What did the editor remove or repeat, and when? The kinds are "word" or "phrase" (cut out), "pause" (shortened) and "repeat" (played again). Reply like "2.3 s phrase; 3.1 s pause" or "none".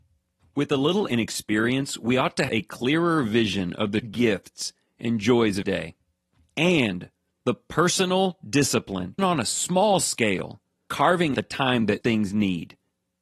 1.1 s word; 2.5 s word; 4.0 s word; 5.6 s word; 9.2 s word; 10.9 s word; 11.3 s word; 12.0 s word